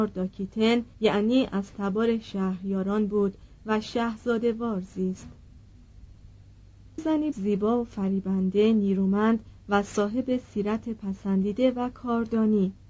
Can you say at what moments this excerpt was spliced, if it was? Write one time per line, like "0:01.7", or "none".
0:00.9
0:07.0
0:07.3